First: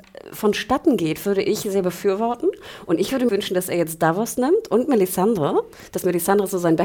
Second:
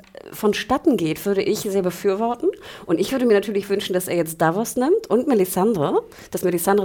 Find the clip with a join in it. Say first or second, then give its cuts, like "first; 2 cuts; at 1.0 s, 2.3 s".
first; 1 cut; at 3.3 s